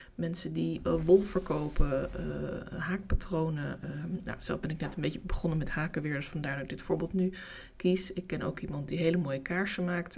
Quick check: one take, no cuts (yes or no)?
yes